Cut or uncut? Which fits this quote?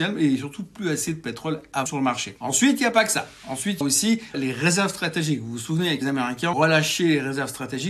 cut